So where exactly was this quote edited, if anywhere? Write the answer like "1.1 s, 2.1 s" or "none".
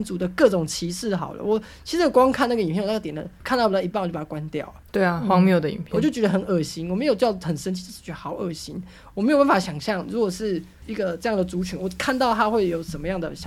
none